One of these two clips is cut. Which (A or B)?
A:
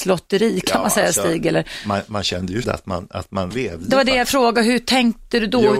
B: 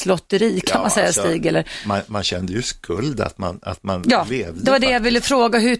A